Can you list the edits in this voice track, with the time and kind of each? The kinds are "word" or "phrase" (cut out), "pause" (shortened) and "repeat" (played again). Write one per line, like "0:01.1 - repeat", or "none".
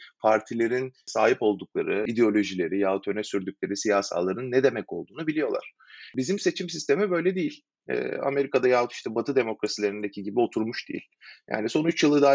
none

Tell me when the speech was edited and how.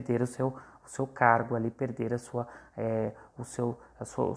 none

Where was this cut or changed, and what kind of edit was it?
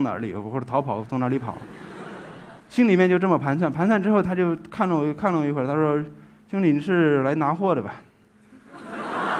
0:02.6 - pause

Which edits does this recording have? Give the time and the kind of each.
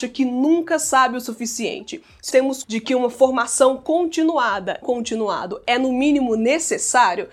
0:02.3 - word
0:02.6 - word
0:04.8 - word

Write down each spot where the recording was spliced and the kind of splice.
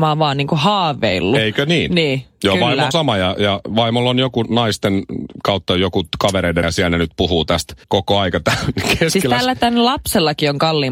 0:02.9 - word
0:06.6 - word
0:07.8 - pause

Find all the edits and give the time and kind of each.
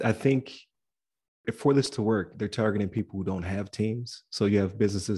0:01.4 - word

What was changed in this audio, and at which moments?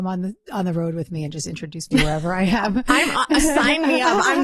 none

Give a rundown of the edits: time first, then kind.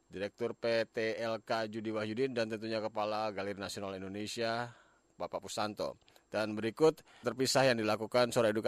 0:07.2 - word

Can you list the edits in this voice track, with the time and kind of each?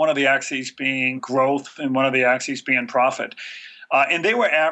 0:01.2 - word

